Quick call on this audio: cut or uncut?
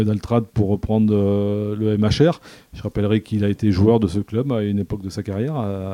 uncut